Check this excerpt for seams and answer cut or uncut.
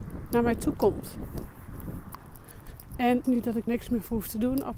cut